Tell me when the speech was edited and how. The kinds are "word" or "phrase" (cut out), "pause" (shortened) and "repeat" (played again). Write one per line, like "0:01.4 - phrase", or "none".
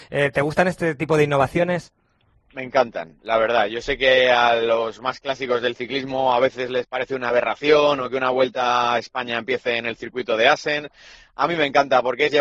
none